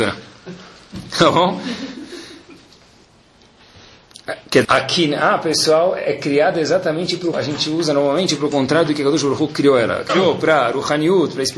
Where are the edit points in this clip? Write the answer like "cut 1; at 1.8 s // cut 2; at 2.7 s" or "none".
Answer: cut 1; at 4.6 s // cut 2; at 7.3 s // cut 3; at 10.1 s